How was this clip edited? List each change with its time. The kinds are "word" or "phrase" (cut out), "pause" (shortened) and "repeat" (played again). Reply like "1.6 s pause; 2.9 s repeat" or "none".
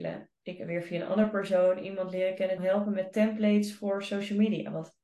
2.6 s phrase